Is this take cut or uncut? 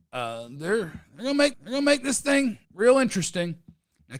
cut